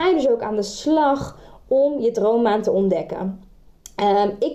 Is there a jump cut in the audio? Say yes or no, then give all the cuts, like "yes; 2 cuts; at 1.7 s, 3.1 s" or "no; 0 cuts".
no; 0 cuts